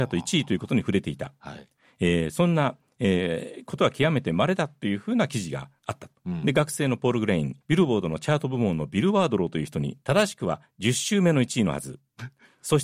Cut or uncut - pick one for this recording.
cut